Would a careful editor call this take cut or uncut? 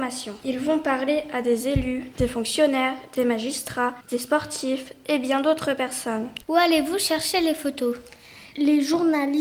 cut